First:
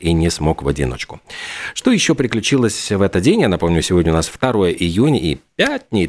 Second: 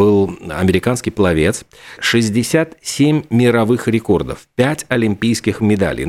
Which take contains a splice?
second; 1 cut; at 2.0 s

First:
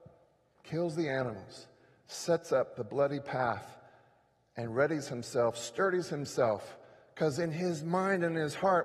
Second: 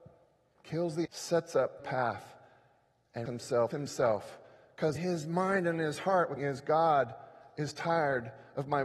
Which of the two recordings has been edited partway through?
second; 6 cuts; at 1.0 s, 1.8 s, 3.3 s, 3.7 s, 5.0 s, 6.4 s

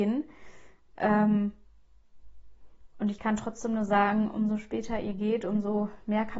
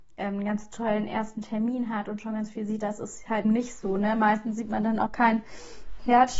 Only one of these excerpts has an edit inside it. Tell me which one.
second; 2 cuts; at 3.4 s, 5.1 s

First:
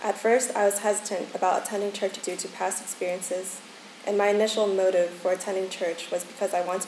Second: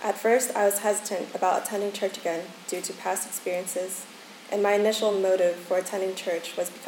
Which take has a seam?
first; 1 cut; at 2.2 s

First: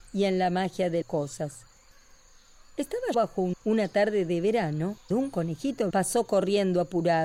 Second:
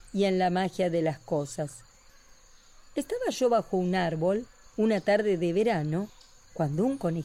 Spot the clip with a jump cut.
first; 5 cuts; at 1.0 s, 3.1 s, 3.5 s, 5.1 s, 5.9 s

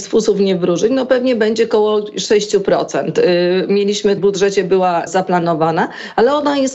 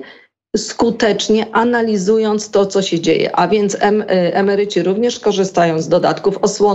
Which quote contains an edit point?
first; 2 cuts; at 4.2 s, 5.1 s

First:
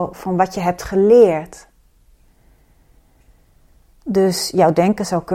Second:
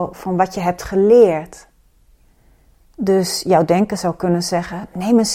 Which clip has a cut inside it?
second; 1 cut; at 2.6 s

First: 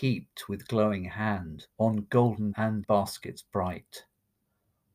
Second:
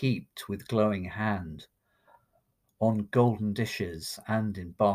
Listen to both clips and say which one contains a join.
first; 3 cuts; at 1.7 s, 2.5 s, 2.8 s

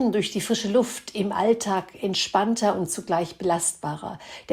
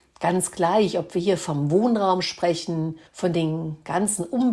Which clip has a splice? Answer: second; 1 cut; at 3.1 s

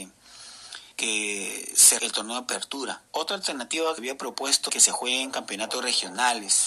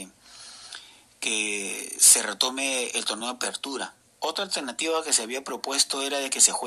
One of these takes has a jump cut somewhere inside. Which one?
first; 5 cuts; at 0.9 s, 2.0 s, 3.1 s, 4.0 s, 4.7 s

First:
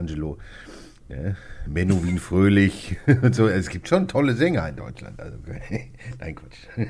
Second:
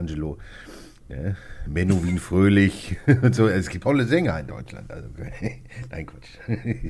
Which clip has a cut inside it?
second; 1 cut; at 3.8 s

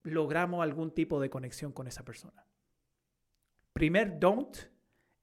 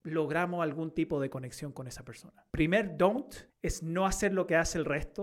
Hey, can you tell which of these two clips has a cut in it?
second; 2 cuts; at 2.5 s, 3.5 s

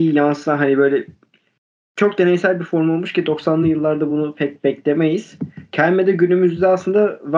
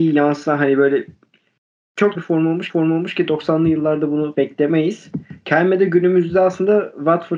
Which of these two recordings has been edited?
second; 3 cuts; at 2.2 s, 2.7 s, 4.3 s

